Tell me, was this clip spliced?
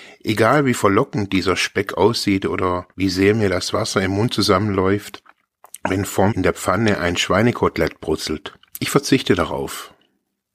yes; 3 cuts; at 2.9 s, 6.3 s, 8.7 s

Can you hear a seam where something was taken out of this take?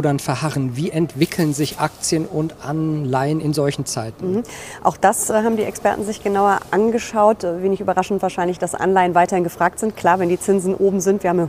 no; 0 cuts

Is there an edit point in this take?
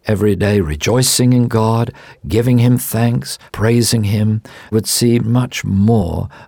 yes; 3 cuts; at 3.5 s, 4.7 s, 5.2 s

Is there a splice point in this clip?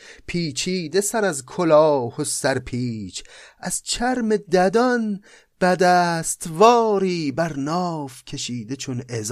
no; 0 cuts

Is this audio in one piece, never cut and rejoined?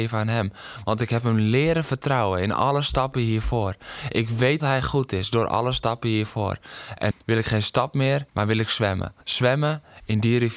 no; 4 cuts; at 4.6 s, 7.1 s, 8.3 s, 9.2 s

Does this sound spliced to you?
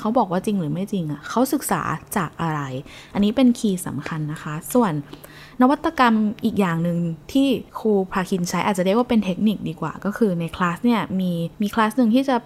yes; 2 cuts; at 7.7 s, 11.5 s

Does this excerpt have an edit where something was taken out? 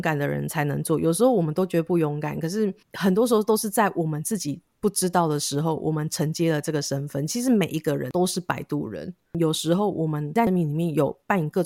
yes; 1 cut; at 2.8 s

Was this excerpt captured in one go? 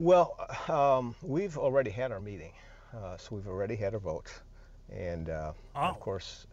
yes; 0 cuts

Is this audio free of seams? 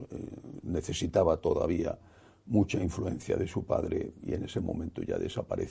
yes; 0 cuts

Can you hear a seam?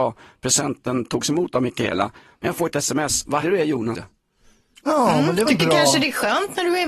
yes; 4 cuts; at 2.7 s, 3.4 s, 3.9 s, 5.5 s

